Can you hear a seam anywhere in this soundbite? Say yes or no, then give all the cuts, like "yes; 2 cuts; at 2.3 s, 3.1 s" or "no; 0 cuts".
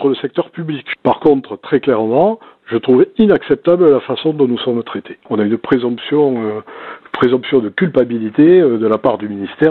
no; 0 cuts